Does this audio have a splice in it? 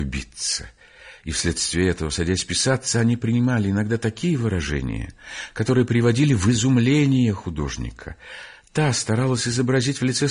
no; 0 cuts

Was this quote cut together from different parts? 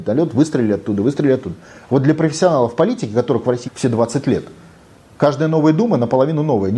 yes; 1 cut; at 3.6 s

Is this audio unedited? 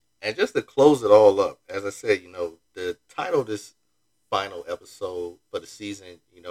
no; 1 cut; at 2.6 s

